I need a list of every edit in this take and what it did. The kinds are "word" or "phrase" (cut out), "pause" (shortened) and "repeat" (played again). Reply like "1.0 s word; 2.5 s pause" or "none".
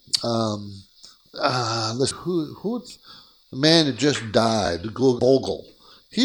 1.3 s word; 2.1 s word; 5.2 s word